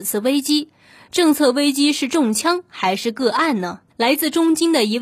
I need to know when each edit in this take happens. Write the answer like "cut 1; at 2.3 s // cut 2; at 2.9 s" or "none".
cut 1; at 3.9 s